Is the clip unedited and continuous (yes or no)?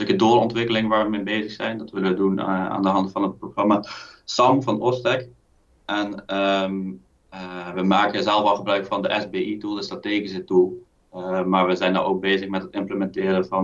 yes